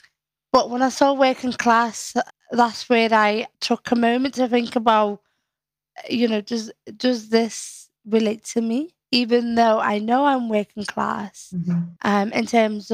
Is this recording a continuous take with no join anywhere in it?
no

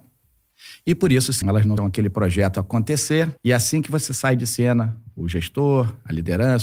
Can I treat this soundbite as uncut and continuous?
no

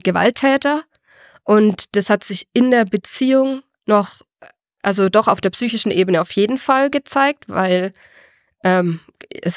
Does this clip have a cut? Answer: no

